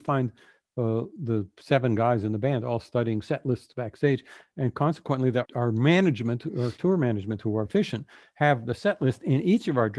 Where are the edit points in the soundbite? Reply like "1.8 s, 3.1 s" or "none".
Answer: 1.2 s, 5.4 s, 7.7 s